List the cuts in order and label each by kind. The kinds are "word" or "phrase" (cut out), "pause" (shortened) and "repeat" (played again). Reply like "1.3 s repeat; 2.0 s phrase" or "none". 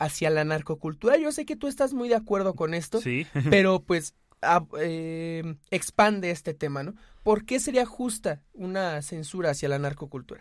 none